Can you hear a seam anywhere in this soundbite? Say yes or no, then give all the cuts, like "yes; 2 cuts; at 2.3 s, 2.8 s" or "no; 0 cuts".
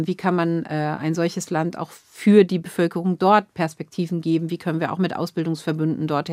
no; 0 cuts